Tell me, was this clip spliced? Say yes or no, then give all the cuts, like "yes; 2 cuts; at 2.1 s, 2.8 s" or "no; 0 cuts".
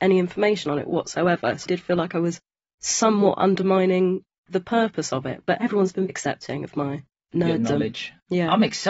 yes; 3 cuts; at 1.7 s, 6.1 s, 7.1 s